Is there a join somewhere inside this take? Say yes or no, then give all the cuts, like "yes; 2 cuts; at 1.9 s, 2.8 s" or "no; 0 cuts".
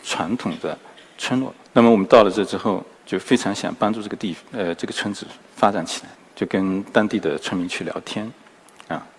yes; 3 cuts; at 1.6 s, 2.9 s, 5.4 s